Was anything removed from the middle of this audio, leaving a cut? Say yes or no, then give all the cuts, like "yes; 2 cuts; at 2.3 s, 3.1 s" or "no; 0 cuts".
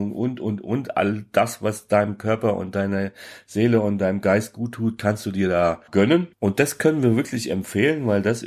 yes; 1 cut; at 6.3 s